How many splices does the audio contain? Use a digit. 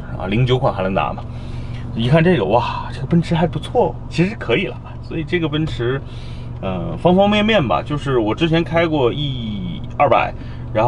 1